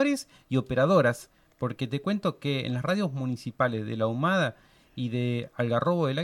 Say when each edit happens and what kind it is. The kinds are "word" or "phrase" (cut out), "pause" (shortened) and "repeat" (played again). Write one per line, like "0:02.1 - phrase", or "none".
none